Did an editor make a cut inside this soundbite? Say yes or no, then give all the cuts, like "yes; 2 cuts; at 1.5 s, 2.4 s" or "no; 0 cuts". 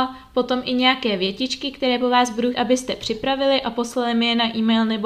yes; 1 cut; at 2.5 s